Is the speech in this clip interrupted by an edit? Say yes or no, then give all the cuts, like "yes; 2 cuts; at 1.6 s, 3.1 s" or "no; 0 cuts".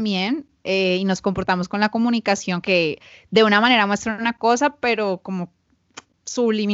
yes; 1 cut; at 2.6 s